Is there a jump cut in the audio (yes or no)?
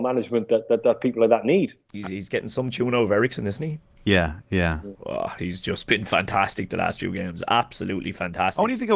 yes